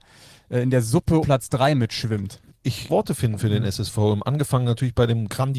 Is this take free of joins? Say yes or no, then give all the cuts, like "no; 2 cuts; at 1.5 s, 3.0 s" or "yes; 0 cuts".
no; 2 cuts; at 1.2 s, 2.9 s